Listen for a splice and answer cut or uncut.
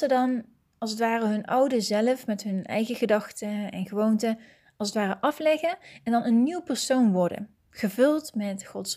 uncut